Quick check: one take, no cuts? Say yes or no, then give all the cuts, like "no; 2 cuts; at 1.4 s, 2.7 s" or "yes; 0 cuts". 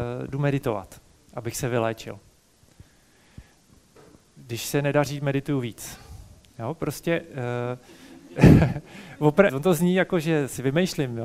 no; 1 cut; at 9.5 s